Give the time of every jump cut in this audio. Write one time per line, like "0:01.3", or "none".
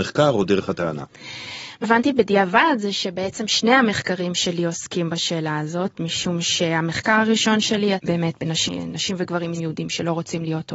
0:01.8
0:07.9
0:09.6